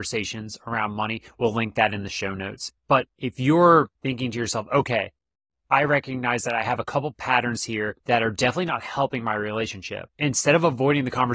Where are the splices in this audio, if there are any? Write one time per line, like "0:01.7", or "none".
0:02.8
0:04.0
0:08.0